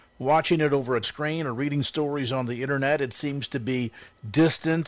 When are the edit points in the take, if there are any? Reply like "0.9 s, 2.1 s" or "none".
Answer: 1.0 s